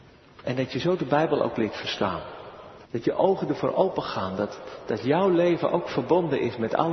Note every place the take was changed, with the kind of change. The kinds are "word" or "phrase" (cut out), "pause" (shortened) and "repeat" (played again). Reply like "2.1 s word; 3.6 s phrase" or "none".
2.8 s pause